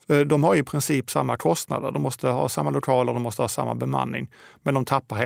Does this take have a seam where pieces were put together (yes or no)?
no